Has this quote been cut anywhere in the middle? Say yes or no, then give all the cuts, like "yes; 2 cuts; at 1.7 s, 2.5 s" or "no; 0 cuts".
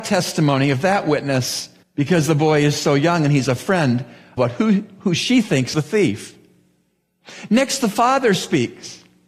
yes; 3 cuts; at 1.8 s, 4.4 s, 5.7 s